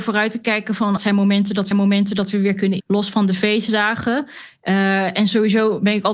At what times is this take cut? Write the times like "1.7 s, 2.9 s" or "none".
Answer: 1.0 s, 1.7 s, 2.8 s